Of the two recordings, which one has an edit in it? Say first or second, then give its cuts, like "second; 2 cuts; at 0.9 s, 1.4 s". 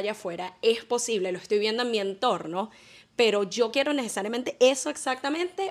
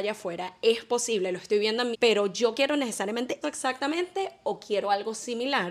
second; 2 cuts; at 1.9 s, 3.4 s